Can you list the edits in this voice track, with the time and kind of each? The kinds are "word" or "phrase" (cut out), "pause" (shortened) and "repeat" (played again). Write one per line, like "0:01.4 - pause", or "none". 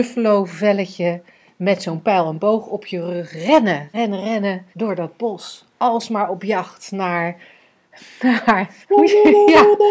0:03.9 - word
0:04.7 - pause
0:08.8 - pause